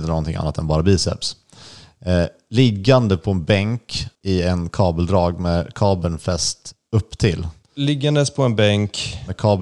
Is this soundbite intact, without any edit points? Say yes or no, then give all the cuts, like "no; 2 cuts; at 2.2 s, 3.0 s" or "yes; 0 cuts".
no; 2 cuts; at 4.2 s, 7.6 s